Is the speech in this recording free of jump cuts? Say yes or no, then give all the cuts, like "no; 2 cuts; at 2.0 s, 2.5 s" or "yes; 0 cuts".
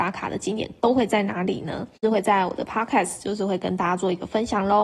yes; 0 cuts